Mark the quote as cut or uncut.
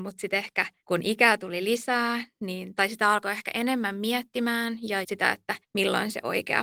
cut